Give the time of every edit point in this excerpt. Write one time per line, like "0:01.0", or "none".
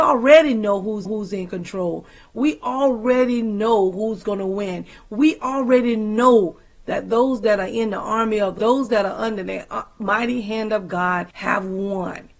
0:01.1
0:08.6
0:11.3